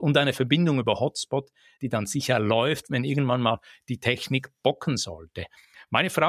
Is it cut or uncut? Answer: uncut